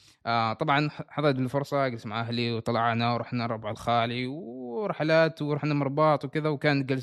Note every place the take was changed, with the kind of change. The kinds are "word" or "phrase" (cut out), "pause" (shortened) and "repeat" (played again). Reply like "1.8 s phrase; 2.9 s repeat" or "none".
none